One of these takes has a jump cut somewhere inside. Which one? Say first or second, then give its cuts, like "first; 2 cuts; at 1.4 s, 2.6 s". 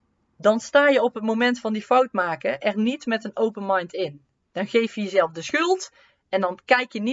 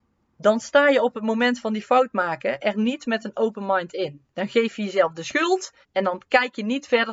second; 2 cuts; at 4.3 s, 5.8 s